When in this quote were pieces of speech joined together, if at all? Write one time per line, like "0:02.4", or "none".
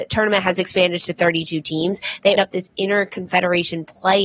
0:02.4